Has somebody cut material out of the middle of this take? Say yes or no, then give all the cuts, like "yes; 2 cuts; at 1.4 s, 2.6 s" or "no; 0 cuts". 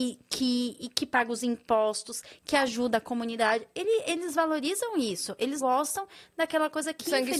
yes; 1 cut; at 5.6 s